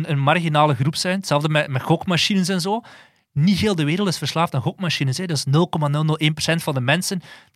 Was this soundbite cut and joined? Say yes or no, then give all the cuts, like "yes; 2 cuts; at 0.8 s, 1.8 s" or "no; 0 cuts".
no; 0 cuts